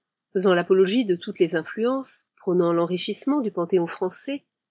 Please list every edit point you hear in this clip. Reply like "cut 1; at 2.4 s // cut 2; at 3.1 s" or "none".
cut 1; at 2.3 s